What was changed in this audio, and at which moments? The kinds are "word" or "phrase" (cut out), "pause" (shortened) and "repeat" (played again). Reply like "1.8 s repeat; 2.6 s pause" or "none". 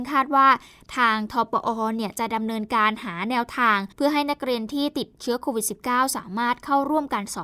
3.9 s pause